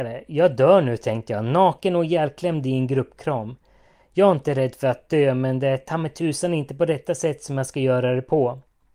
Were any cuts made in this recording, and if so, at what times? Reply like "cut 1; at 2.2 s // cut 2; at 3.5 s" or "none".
none